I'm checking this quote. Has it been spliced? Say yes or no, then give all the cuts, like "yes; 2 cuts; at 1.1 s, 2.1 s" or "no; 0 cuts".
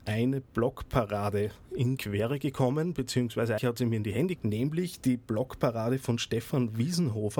yes; 3 cuts; at 2.0 s, 3.6 s, 4.4 s